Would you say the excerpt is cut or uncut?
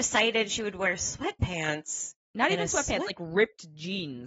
cut